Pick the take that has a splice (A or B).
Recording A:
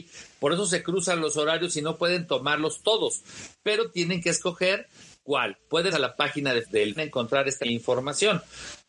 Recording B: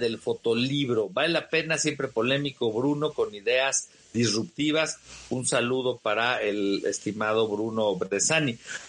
A